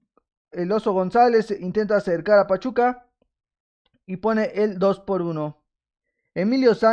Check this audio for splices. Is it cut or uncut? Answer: uncut